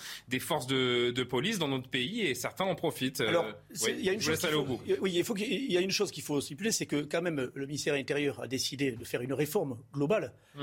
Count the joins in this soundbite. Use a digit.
0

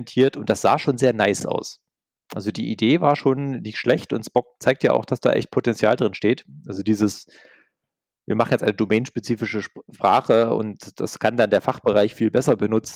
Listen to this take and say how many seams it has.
0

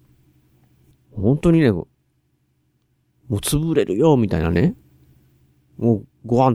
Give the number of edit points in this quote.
0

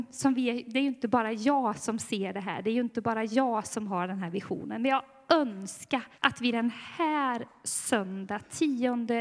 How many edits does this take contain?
1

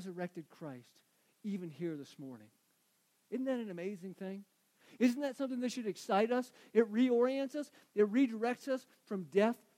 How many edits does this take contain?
0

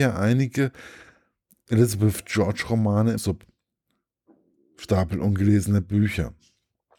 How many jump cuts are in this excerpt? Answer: 1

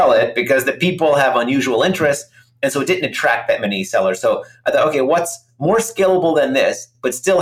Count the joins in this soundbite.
0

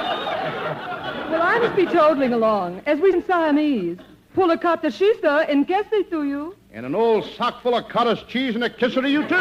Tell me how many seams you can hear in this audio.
2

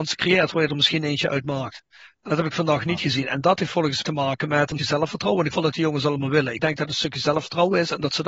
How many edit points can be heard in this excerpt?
3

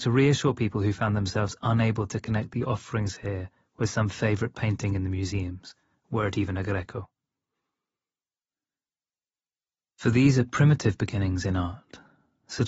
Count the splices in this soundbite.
0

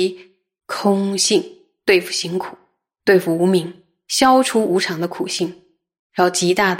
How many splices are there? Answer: 0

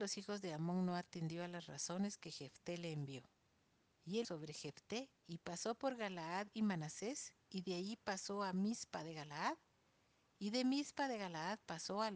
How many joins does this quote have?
3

